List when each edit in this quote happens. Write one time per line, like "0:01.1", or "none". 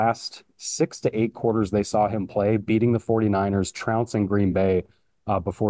none